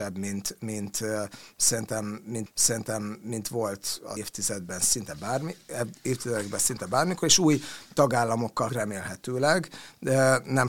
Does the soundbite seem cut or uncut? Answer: cut